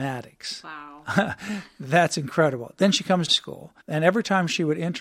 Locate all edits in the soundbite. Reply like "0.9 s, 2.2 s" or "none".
3.3 s, 3.8 s